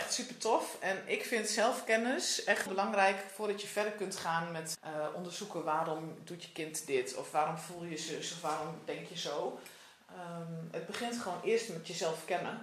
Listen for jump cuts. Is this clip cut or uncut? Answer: cut